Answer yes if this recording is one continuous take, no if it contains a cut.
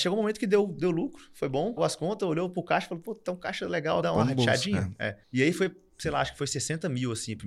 no